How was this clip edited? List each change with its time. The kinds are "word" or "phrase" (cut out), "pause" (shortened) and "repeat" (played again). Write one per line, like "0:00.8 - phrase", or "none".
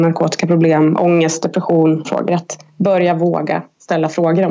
0:02.0 - phrase